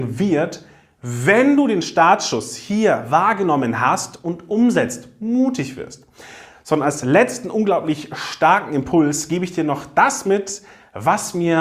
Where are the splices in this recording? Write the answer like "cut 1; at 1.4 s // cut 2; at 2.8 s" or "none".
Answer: none